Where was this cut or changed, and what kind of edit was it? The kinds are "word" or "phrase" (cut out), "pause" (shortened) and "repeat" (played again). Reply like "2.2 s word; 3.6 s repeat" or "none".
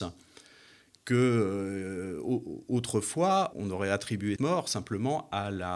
3.5 s word; 4.4 s word